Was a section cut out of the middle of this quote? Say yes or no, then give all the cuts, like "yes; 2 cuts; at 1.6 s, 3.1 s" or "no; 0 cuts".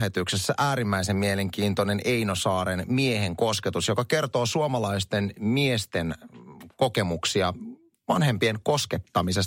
no; 0 cuts